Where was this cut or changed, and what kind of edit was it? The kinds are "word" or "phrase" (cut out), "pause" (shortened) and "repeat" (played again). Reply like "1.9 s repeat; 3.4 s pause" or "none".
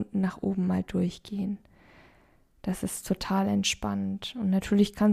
none